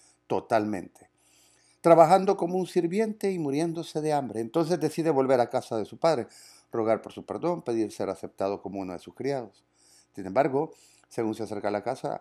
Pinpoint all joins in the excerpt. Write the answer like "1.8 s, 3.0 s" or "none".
none